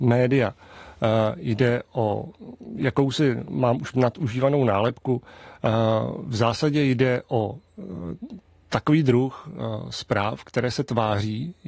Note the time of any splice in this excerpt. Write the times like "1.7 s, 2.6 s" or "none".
3.9 s